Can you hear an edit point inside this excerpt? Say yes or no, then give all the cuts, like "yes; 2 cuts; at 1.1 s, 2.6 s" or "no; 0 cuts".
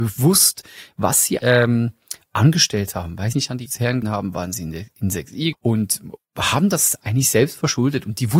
yes; 6 cuts; at 1.4 s, 3.3 s, 3.7 s, 4.0 s, 5.5 s, 6.2 s